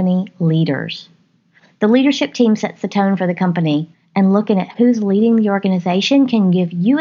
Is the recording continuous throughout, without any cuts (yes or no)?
no